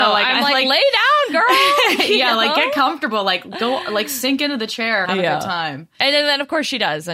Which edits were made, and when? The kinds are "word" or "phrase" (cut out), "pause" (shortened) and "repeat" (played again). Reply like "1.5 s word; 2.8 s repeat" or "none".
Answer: 5.0 s word

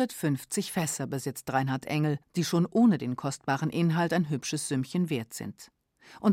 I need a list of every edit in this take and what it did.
2.2 s pause

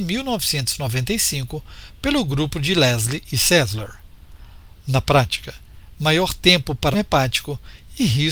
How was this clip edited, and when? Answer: 6.9 s word

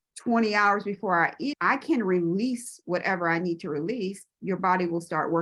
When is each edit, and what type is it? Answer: 1.5 s word

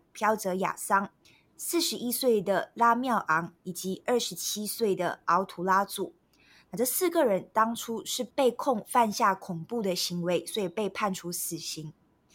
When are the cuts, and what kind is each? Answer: none

